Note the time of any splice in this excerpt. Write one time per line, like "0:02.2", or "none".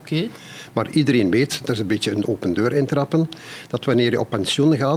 none